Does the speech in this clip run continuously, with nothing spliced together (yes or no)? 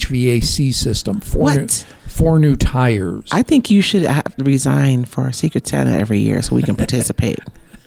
yes